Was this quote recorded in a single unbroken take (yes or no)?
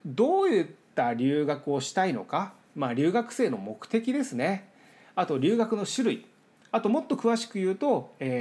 yes